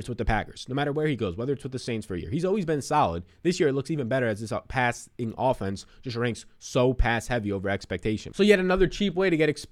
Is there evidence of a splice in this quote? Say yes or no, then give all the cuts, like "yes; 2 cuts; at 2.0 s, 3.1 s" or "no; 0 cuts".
no; 0 cuts